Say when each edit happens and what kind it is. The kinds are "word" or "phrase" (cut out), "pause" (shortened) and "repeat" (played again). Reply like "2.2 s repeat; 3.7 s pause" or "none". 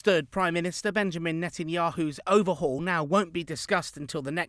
none

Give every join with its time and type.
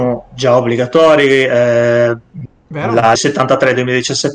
3.2 s word

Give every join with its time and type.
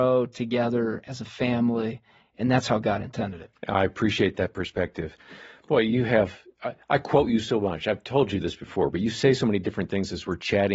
none

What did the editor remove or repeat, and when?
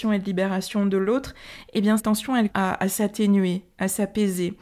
2.0 s word; 2.5 s word

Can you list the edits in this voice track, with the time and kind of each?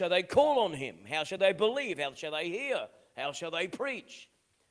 none

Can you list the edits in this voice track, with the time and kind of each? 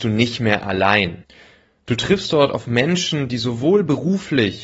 none

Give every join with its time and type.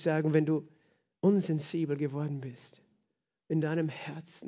none

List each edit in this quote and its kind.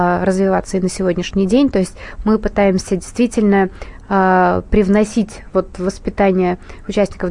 none

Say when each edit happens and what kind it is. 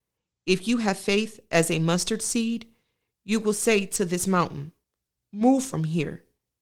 none

